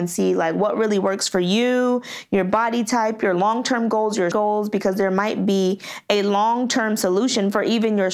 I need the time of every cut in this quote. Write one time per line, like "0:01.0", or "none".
0:04.3